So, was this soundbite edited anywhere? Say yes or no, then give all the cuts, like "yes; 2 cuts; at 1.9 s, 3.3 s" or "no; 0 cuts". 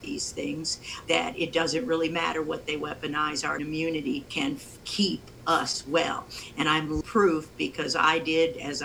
yes; 4 cuts; at 1.1 s, 3.6 s, 4.3 s, 7.0 s